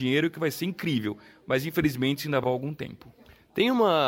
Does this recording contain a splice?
yes; 1 cut; at 2.4 s

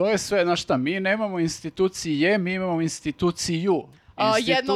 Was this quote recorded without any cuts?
yes; 0 cuts

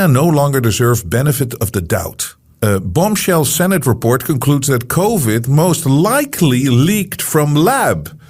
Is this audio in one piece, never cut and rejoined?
no; 1 cut; at 2.5 s

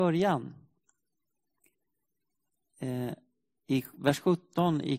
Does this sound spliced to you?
no; 0 cuts

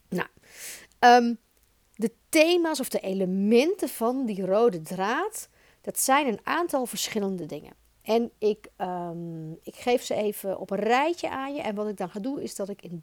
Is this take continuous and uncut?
yes; 0 cuts

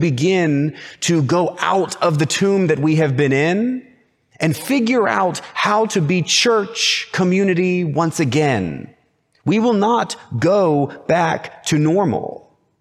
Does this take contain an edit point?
no; 0 cuts

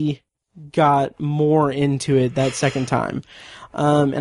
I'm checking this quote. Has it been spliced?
no; 0 cuts

